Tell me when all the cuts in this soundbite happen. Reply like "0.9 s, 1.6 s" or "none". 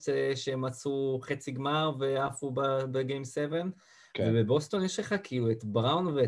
none